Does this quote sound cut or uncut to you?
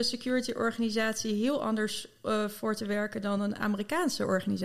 uncut